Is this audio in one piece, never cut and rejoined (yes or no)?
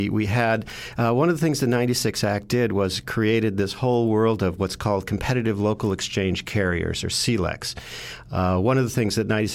yes